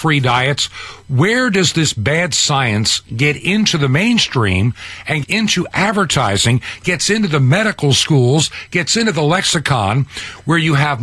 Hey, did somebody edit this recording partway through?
yes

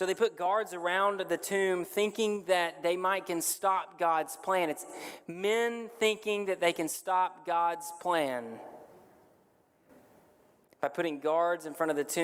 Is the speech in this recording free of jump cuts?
yes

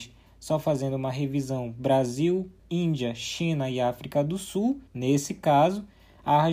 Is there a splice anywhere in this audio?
yes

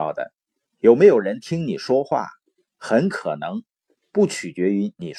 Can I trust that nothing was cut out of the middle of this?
yes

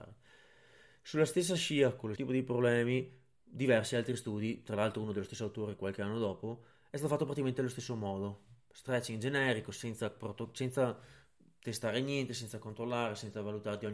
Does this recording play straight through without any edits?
no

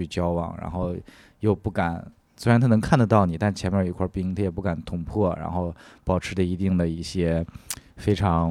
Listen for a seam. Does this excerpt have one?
no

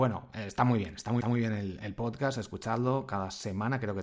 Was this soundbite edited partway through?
yes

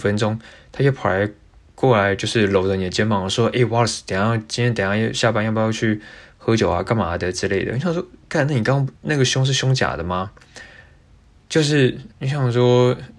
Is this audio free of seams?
no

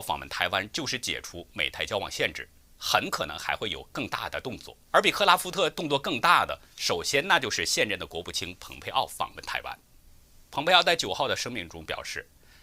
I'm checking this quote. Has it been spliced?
yes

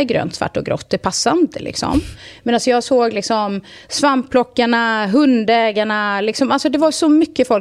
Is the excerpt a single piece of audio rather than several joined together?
yes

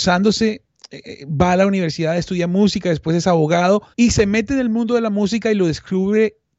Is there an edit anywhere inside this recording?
yes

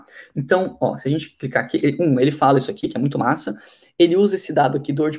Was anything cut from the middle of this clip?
no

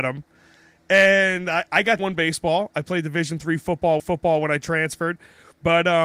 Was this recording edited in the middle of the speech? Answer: yes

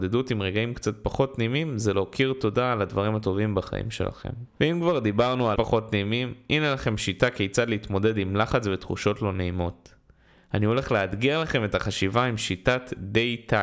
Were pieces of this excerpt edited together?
yes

